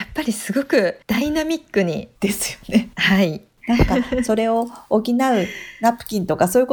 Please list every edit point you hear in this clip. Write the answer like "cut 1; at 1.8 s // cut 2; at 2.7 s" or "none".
cut 1; at 1.0 s // cut 2; at 2.2 s // cut 3; at 2.9 s